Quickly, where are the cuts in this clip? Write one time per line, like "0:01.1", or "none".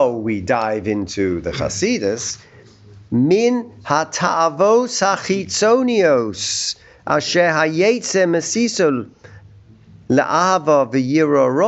none